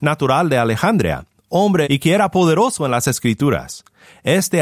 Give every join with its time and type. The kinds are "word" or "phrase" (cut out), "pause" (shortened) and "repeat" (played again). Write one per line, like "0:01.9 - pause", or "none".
0:01.8 - word